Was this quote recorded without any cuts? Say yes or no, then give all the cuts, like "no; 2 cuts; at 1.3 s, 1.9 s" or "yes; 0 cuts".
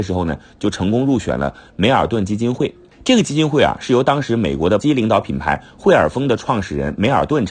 no; 1 cut; at 4.8 s